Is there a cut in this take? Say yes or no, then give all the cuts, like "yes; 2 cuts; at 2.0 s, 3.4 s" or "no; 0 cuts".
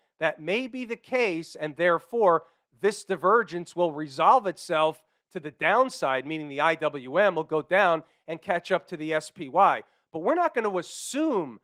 no; 0 cuts